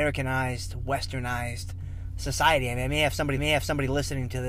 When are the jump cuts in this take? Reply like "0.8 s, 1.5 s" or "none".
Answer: 3.4 s